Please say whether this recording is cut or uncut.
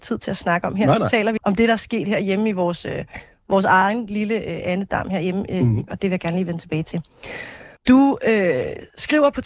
cut